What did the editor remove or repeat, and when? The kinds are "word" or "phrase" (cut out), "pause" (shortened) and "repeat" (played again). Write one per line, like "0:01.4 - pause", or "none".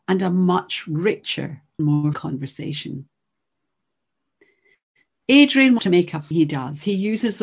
0:01.8 - word
0:02.1 - word
0:05.8 - word
0:06.3 - phrase